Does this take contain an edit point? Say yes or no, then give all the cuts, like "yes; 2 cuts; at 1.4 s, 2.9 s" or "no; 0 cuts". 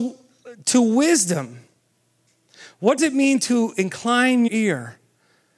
yes; 2 cuts; at 3.0 s, 4.5 s